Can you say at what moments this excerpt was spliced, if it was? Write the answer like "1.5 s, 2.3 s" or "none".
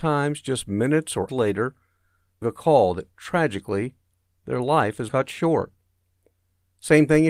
1.3 s, 2.4 s, 5.1 s